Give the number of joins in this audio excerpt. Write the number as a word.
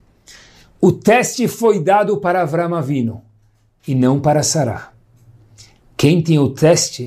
zero